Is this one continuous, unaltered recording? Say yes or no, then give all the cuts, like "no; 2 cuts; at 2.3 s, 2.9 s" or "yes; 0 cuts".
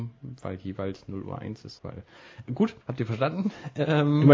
no; 2 cuts; at 1.8 s, 2.8 s